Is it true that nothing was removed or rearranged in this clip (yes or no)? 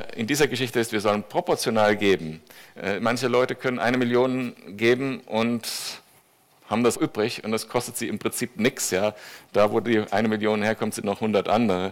no